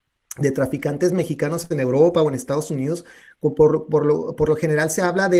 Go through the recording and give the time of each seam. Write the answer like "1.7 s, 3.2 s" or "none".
none